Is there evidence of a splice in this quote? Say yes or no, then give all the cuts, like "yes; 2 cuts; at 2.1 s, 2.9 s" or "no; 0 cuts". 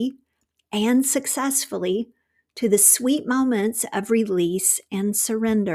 no; 0 cuts